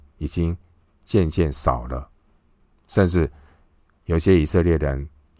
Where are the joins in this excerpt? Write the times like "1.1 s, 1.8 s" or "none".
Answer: none